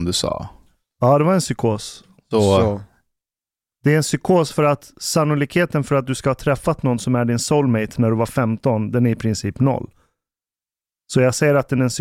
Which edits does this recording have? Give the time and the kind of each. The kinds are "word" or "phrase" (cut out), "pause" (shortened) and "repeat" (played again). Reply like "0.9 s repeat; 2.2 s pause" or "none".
none